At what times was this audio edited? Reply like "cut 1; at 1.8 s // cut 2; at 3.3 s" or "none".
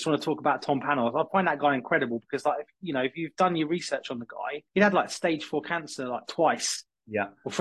cut 1; at 4.7 s